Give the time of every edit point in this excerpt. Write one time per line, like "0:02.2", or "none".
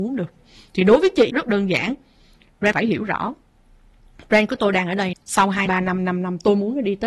0:01.3
0:02.7
0:05.1
0:05.7

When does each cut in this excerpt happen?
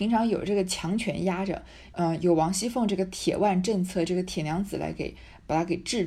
0:01.9

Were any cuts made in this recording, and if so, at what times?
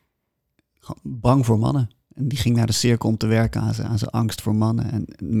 none

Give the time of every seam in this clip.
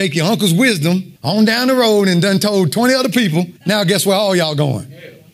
0:01.2
0:03.6

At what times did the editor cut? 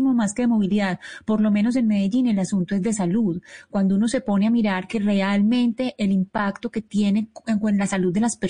none

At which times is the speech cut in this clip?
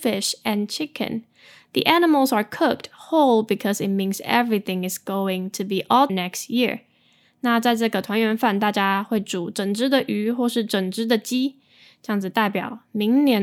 0:06.1

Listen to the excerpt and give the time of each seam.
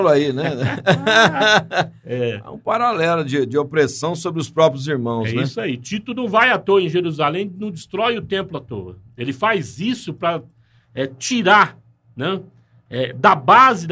none

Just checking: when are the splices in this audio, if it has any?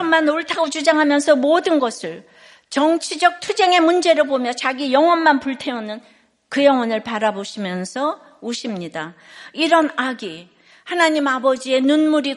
none

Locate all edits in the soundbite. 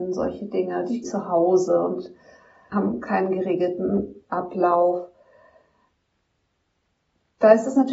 0:01.0
0:02.7
0:04.2

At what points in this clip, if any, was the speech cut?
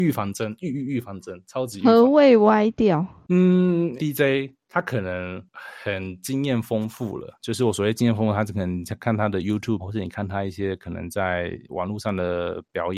0:04.0
0:09.8

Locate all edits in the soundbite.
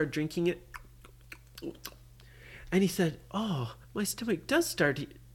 0:03.8

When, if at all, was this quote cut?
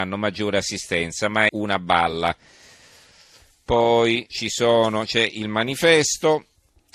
0:01.5
0:04.3

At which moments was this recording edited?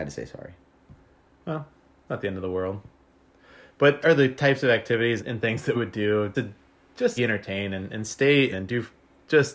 0:02.1
0:04.0
0:05.2
0:05.7
0:06.3
0:07.2
0:08.5

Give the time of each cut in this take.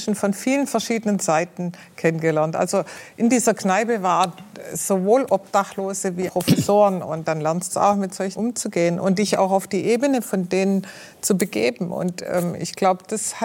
0:06.3
0:07.7
0:08.4

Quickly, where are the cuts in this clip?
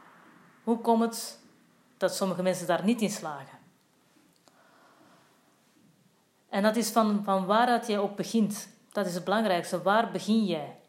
none

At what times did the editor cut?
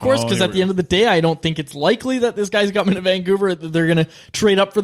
none

